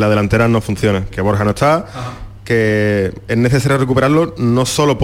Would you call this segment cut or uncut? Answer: cut